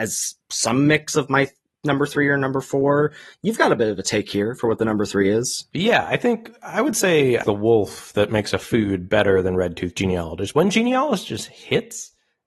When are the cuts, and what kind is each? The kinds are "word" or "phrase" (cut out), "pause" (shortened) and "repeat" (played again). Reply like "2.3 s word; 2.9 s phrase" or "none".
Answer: 7.4 s word

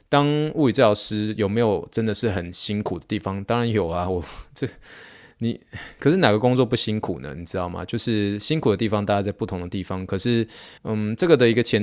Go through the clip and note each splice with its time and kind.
10.8 s pause

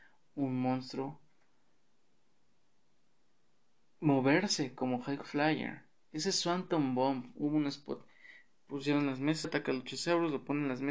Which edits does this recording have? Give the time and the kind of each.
9.4 s word

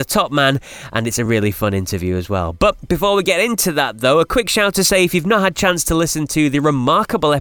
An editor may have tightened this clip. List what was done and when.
none

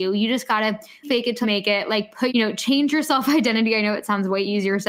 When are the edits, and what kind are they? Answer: 1.0 s word; 1.4 s word; 2.3 s word

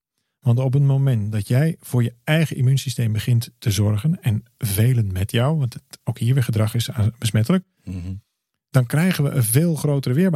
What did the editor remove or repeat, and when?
none

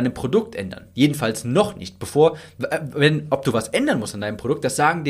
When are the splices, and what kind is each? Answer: none

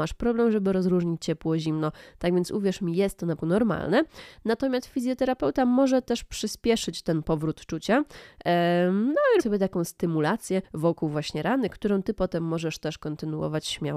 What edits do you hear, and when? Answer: 3.4 s word; 9.4 s word; 10.6 s pause

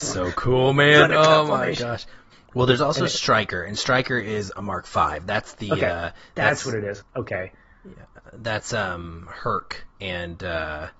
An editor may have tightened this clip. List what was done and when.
2.3 s pause; 9.9 s pause

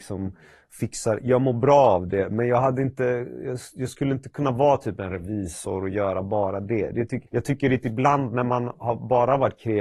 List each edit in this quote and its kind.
7.3 s pause

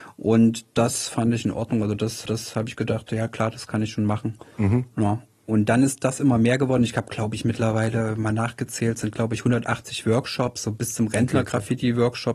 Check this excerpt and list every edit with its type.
2.3 s repeat; 10.6 s word

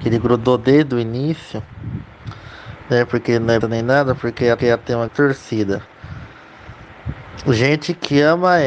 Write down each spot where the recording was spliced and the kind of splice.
3.6 s word; 4.6 s repeat; 5.1 s word

